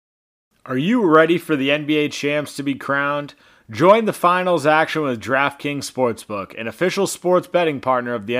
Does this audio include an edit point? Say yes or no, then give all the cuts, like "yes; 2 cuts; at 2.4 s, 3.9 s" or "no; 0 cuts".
no; 0 cuts